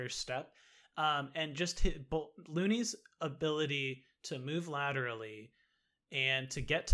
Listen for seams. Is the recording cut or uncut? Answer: uncut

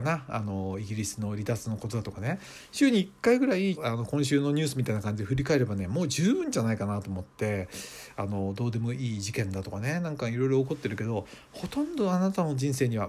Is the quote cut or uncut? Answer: cut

